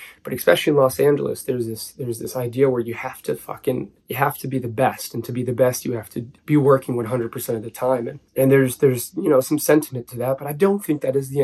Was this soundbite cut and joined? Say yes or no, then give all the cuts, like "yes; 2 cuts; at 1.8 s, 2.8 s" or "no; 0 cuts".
yes; 3 cuts; at 4.0 s, 6.4 s, 8.3 s